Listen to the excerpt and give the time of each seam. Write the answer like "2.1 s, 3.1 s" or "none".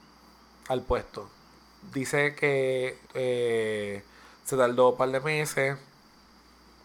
3.0 s